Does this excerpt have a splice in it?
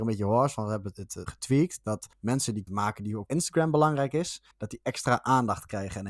yes; 6 cuts; at 0.9 s, 1.3 s, 2.1 s, 2.7 s, 3.3 s, 4.5 s

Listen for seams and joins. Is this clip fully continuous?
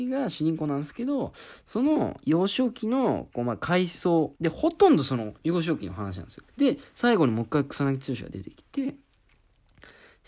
no; 3 cuts; at 4.4 s, 5.4 s, 6.5 s

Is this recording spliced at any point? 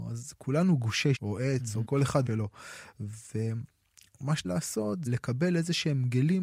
yes; 5 cuts; at 1.2 s, 1.8 s, 2.3 s, 4.4 s, 5.1 s

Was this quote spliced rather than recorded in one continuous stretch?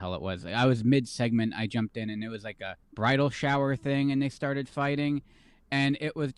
yes; 1 cut; at 2.8 s

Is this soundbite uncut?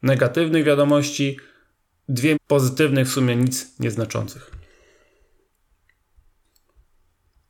no; 1 cut; at 2.3 s

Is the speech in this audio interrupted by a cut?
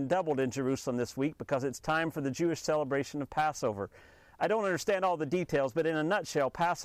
no; 0 cuts

